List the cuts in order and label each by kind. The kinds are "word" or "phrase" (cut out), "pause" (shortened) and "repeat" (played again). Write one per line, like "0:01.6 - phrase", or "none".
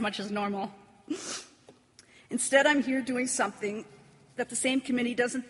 none

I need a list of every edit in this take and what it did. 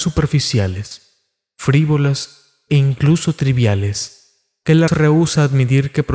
0:04.9 - word

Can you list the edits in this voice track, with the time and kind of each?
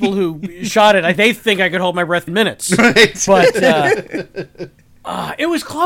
0:01.2 - word
0:02.3 - word
0:03.3 - word

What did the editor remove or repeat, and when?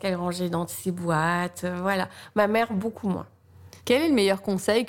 0:03.8 - pause

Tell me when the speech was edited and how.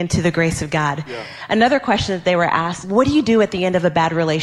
0:02.8 - word

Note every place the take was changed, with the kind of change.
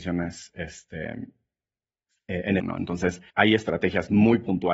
0:02.6 - word
0:03.3 - pause

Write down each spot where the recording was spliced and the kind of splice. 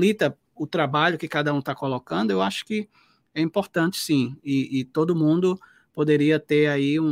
none

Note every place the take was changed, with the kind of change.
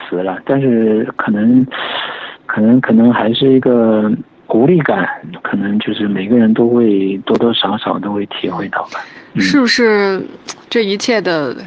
none

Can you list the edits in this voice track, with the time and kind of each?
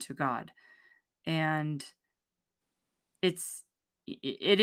none

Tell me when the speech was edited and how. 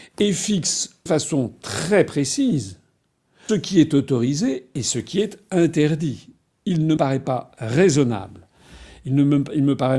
0:01.1 - word
0:03.5 - word
0:07.0 - word

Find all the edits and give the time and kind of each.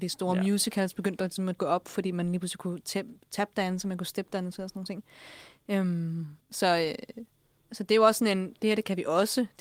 0:01.6 - word
0:06.4 - pause

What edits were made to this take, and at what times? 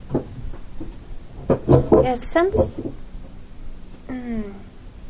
0:02.2 - phrase

